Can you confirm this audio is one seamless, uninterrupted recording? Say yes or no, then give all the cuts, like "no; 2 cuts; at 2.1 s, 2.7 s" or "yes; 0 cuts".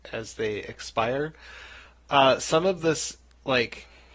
yes; 0 cuts